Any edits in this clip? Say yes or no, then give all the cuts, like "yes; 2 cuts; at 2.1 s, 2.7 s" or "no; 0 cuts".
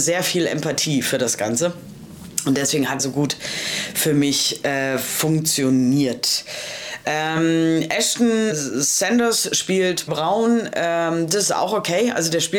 yes; 3 cuts; at 3.0 s, 8.5 s, 10.1 s